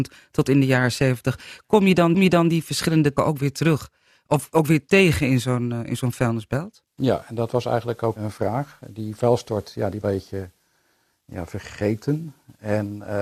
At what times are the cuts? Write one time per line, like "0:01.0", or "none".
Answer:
0:02.1
0:03.2
0:06.9
0:08.2
0:10.0